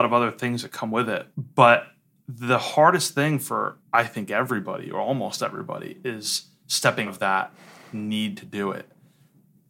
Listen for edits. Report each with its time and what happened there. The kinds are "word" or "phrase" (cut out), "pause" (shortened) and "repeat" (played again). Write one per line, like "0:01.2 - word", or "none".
0:01.3 - pause
0:03.8 - pause
0:07.1 - word